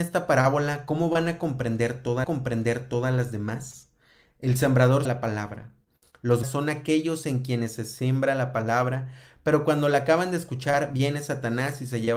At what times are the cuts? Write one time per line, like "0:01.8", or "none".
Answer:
0:02.2
0:05.0
0:06.4